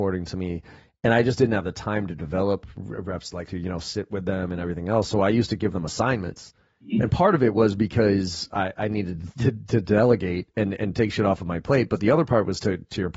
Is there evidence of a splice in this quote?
yes; 1 cut; at 3.5 s

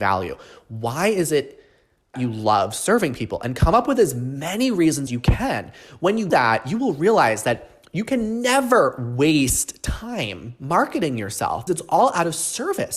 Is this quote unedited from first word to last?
no; 4 cuts; at 2.1 s, 5.1 s, 6.3 s, 11.7 s

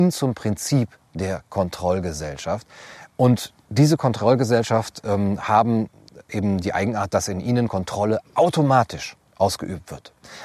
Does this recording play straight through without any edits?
yes; 0 cuts

